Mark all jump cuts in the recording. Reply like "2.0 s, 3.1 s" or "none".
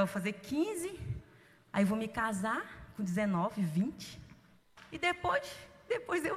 none